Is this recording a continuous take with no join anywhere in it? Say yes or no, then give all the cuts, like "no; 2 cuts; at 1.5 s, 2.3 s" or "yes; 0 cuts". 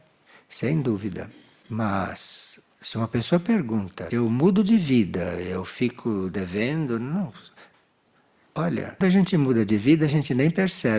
no; 3 cuts; at 2.7 s, 4.1 s, 9.0 s